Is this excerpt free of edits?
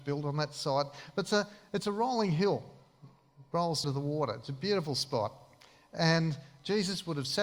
no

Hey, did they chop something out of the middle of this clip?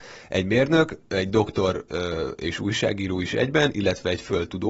no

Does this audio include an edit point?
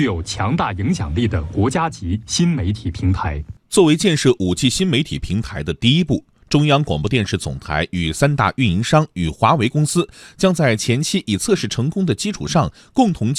yes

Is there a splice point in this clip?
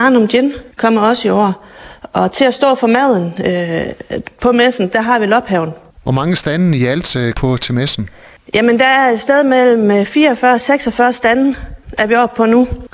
yes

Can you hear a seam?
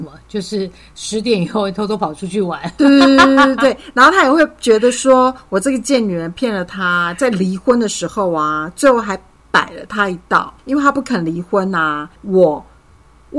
yes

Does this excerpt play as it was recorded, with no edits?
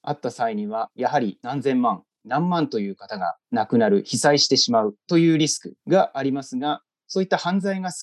yes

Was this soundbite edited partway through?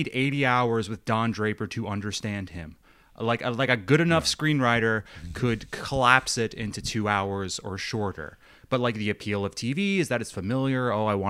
no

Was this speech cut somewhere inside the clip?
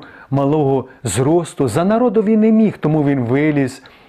no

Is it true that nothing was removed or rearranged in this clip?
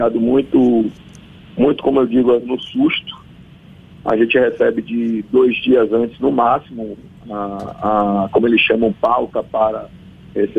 yes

